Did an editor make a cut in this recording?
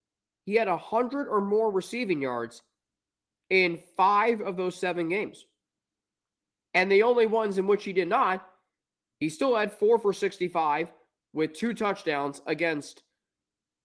no; 0 cuts

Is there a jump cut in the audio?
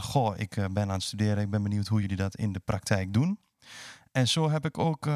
no; 0 cuts

